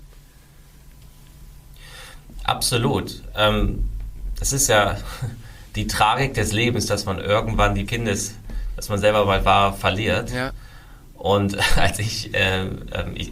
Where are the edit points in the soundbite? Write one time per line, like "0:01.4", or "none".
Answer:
0:07.8